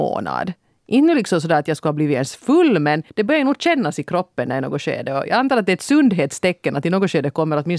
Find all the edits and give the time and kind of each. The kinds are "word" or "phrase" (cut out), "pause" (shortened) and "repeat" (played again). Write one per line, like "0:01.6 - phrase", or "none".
0:03.1 - pause